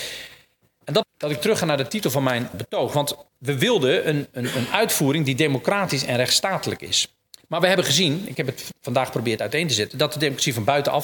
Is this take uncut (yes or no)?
no